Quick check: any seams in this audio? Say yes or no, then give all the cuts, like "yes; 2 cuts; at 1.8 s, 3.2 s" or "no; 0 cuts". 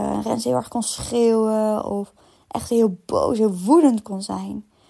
no; 0 cuts